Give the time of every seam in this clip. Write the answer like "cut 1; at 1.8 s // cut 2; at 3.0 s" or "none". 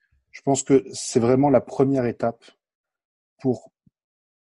none